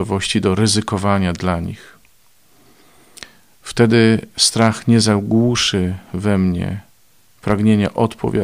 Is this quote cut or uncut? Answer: uncut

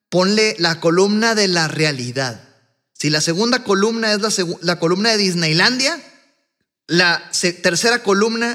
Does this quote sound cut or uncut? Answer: uncut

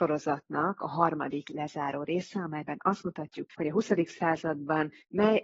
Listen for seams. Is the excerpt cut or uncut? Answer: cut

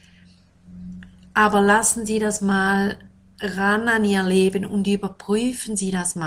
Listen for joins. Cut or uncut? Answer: uncut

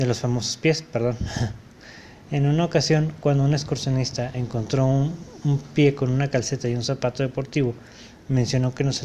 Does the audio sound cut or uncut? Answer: uncut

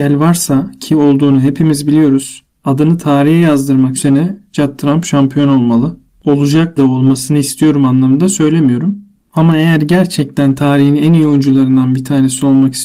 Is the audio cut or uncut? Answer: cut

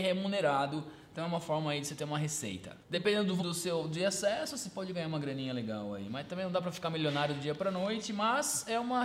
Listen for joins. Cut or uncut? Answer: cut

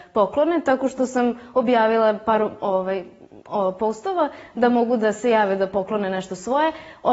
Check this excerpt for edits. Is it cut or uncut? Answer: uncut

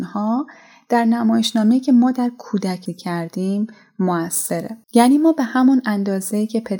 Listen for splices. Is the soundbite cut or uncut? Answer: cut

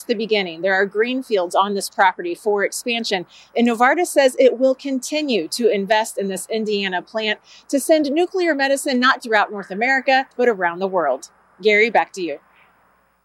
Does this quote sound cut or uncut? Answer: cut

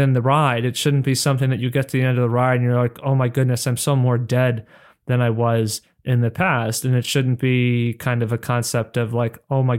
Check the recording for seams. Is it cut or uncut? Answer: uncut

